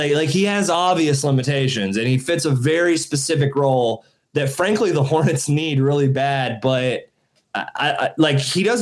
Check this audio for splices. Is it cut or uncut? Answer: uncut